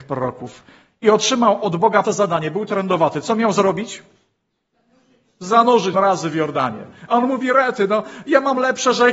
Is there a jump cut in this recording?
yes; 2 cuts; at 2.0 s, 5.9 s

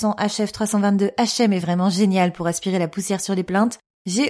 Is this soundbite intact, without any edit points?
yes; 0 cuts

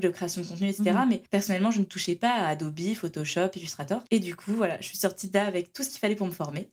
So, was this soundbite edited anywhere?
yes; 2 cuts; at 1.3 s, 4.1 s

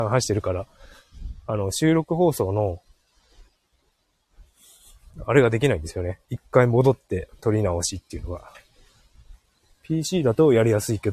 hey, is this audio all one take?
no; 2 cuts; at 6.2 s, 9.5 s

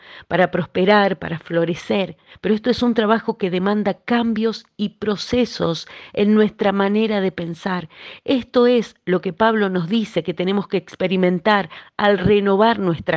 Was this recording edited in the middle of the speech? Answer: no; 0 cuts

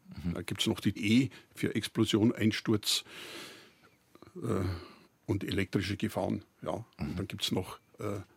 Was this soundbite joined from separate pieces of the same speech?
yes; 2 cuts; at 1.0 s, 5.0 s

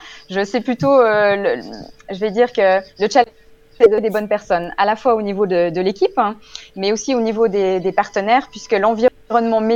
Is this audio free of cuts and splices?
yes; 0 cuts

